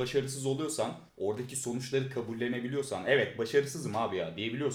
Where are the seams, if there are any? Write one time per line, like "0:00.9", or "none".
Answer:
0:01.1